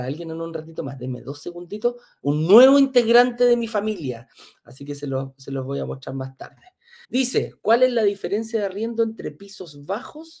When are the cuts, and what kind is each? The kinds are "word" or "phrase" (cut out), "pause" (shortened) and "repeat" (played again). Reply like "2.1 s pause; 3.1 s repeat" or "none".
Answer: 7.0 s pause